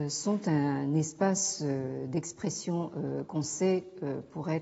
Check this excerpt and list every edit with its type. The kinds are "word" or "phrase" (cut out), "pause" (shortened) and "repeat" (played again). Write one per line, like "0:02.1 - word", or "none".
none